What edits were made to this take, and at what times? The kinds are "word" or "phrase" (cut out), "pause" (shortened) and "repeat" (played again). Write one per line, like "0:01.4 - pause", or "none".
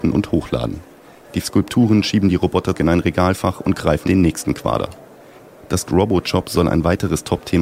0:01.4 - word
0:02.7 - word
0:04.0 - word
0:05.9 - word